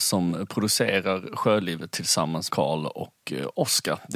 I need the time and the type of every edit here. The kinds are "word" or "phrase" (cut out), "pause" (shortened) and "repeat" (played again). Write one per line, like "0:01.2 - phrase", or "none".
0:02.5 - word